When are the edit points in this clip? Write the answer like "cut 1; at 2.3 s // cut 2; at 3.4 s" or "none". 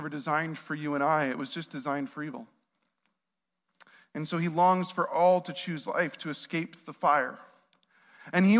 none

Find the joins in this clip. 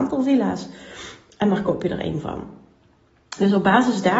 none

